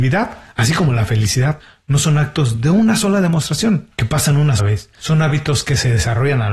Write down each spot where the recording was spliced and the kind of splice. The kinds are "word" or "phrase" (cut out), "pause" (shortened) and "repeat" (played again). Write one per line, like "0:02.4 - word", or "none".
0:04.6 - word